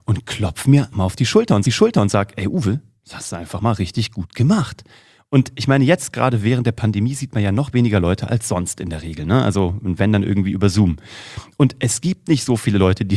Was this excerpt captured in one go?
no; 2 cuts; at 0.9 s, 1.7 s

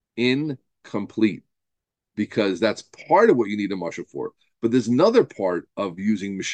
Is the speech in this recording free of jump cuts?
yes; 0 cuts

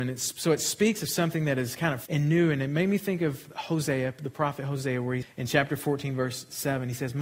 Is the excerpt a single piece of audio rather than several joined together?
no; 2 cuts; at 2.1 s, 5.2 s

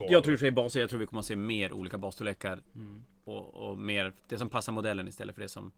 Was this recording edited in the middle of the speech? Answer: yes; 2 cuts; at 2.7 s, 4.2 s

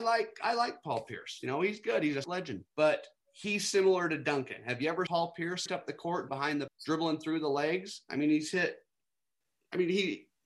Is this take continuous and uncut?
no; 6 cuts; at 2.2 s, 2.7 s, 5.1 s, 5.7 s, 6.3 s, 6.7 s

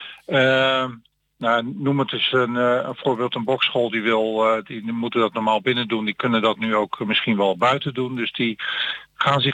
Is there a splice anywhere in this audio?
no; 0 cuts

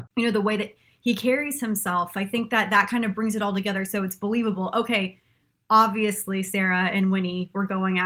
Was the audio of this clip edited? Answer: no; 0 cuts

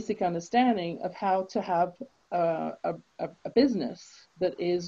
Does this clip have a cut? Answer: no; 0 cuts

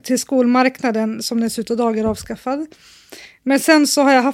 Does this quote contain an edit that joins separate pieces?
no; 0 cuts

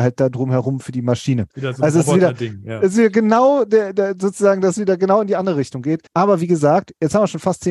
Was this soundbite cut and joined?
yes; 2 cuts; at 1.5 s, 6.1 s

